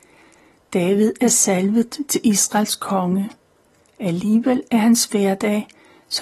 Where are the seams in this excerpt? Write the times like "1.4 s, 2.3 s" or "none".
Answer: none